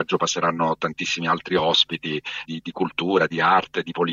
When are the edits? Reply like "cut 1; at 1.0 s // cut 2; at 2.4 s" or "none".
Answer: cut 1; at 2.4 s